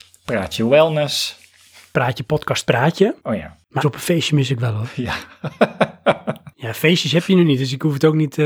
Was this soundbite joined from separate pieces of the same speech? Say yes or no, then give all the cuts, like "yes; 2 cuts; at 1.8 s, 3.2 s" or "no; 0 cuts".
yes; 3 cuts; at 3.2 s, 3.8 s, 6.5 s